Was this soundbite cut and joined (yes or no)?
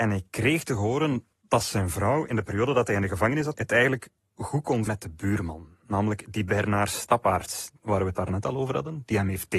yes